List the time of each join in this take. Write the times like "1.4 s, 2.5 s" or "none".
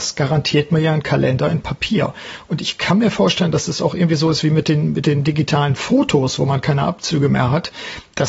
none